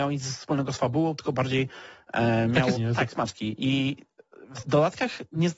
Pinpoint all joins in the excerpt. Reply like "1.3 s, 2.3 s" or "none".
2.7 s, 3.1 s

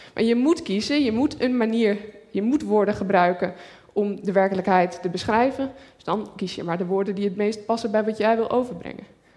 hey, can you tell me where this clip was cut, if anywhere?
none

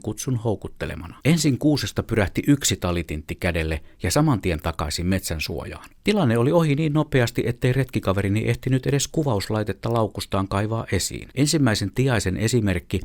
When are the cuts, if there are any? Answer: 1.2 s, 6.0 s, 11.3 s

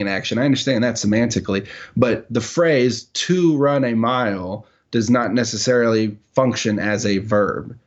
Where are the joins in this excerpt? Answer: none

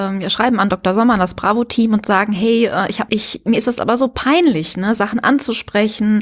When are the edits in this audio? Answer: 3.1 s

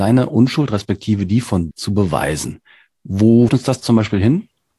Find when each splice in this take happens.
1.7 s, 3.5 s

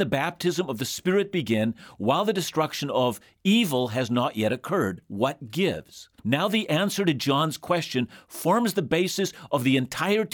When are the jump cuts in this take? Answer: 6.2 s

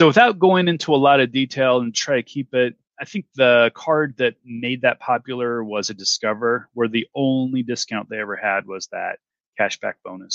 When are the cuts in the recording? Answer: none

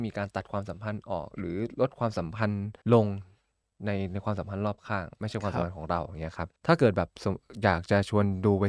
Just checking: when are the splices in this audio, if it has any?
2.8 s, 6.6 s

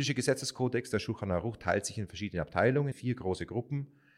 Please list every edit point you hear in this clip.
2.9 s

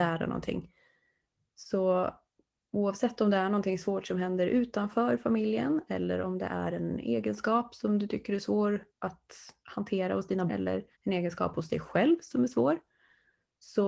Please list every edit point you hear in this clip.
8.9 s, 10.5 s, 10.9 s

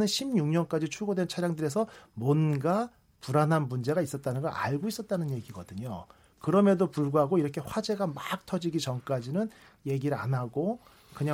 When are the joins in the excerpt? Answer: none

